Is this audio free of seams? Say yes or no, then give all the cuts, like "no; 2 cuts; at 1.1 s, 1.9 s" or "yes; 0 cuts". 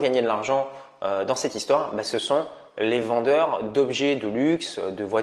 yes; 0 cuts